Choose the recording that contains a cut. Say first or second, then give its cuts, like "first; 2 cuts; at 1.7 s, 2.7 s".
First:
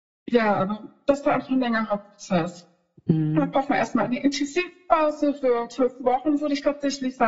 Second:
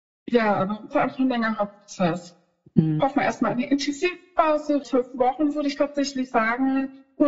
second; 3 cuts; at 0.9 s, 3.0 s, 4.8 s